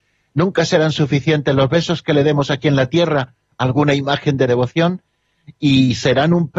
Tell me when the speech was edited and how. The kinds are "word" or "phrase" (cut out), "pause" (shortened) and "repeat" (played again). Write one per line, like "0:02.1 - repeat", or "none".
0:04.5 - word